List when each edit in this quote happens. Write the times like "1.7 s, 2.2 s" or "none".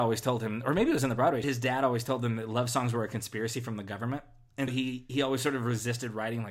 1.4 s, 4.7 s